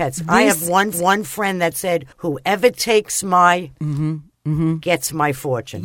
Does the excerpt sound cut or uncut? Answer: cut